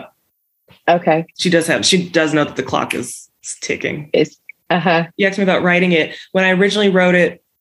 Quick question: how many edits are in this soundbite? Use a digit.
2